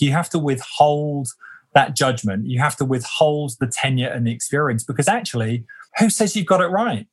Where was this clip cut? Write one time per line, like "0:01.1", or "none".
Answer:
0:05.9

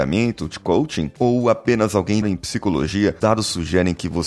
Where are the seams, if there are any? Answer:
0:02.2
0:03.2

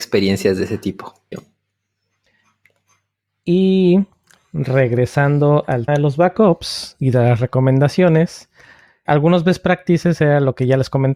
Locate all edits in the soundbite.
0:01.3
0:05.9
0:09.1

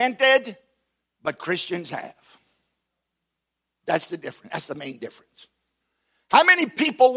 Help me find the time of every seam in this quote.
none

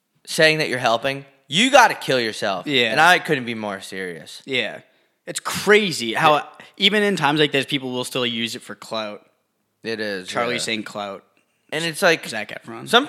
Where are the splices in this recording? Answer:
none

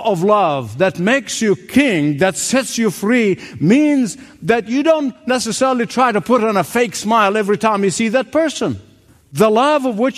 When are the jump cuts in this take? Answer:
0:09.1

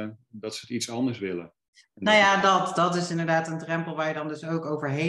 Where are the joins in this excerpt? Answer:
none

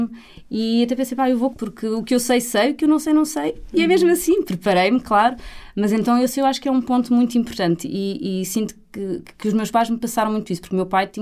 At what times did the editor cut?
0:01.5

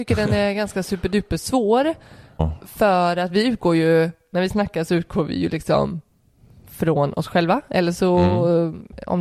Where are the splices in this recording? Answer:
none

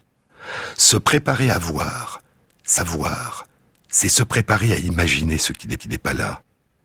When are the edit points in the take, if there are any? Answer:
0:02.8
0:05.8

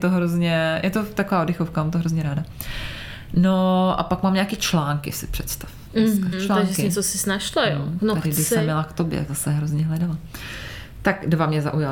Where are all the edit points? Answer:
0:06.3
0:09.3

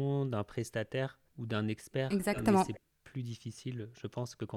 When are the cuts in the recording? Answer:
0:01.3

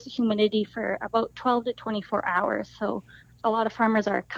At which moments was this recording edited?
0:03.3

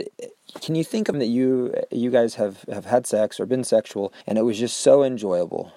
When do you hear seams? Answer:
0:01.1
0:04.2

